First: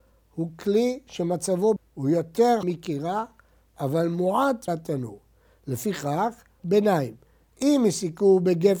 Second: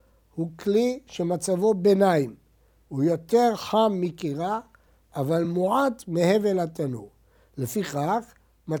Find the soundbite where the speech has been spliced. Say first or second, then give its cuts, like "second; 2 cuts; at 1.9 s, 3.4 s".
first; 4 cuts; at 1.8 s, 2.6 s, 4.7 s, 6.6 s